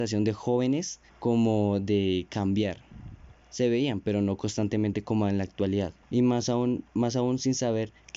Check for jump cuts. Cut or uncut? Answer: cut